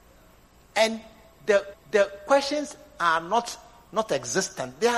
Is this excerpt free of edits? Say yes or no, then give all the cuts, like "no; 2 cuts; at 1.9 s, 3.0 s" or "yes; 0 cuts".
no; 1 cut; at 1.7 s